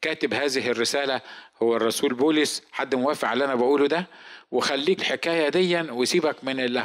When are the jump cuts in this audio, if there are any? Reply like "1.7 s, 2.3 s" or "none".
5.0 s